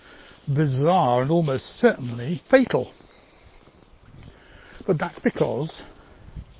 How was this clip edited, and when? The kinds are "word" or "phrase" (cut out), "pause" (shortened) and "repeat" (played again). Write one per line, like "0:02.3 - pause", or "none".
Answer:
0:02.5 - pause